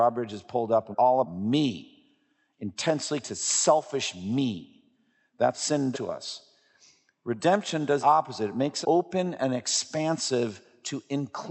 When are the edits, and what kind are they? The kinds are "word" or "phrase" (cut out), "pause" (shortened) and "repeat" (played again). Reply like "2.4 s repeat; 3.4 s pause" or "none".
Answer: 0.9 s word; 1.2 s word; 3.2 s word; 5.5 s word; 5.9 s word; 8.0 s word; 8.8 s word